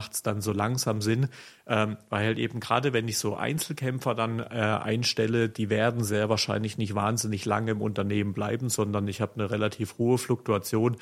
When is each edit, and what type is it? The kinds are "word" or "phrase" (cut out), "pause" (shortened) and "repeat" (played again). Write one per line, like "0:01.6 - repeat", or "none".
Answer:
none

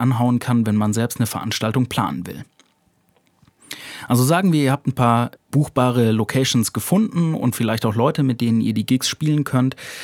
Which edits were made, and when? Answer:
0:05.3 - pause

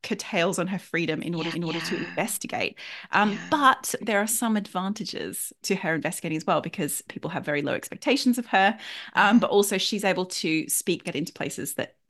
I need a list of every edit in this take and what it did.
0:01.5 - repeat
0:04.0 - word
0:05.6 - word
0:07.1 - word
0:11.0 - phrase

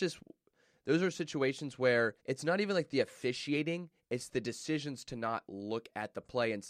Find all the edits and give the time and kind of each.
0:02.2 - pause

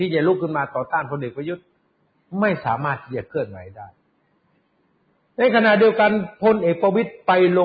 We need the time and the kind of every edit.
none

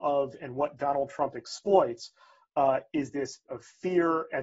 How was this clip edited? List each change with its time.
0:03.5 - word

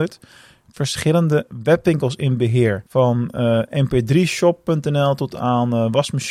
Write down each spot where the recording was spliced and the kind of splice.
0:02.9 - pause

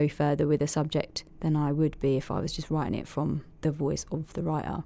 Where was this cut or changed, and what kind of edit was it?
0:01.3 - pause
0:03.5 - pause

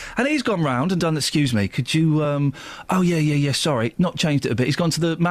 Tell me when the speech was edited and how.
none

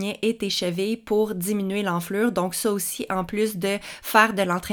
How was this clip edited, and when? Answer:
none

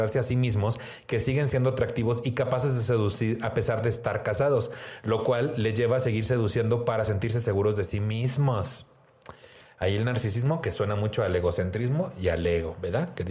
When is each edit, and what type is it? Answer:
none

